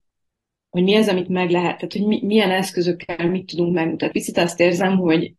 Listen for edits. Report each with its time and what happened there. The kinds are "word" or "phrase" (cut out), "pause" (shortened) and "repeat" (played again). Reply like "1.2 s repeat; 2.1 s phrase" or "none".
4.1 s word